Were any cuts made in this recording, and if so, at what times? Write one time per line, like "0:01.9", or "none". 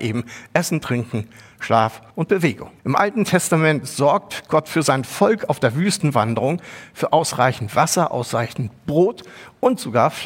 0:02.1
0:02.8